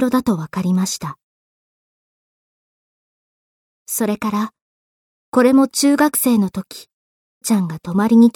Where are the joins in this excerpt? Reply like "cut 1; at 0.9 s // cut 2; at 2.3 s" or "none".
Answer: cut 1; at 7.4 s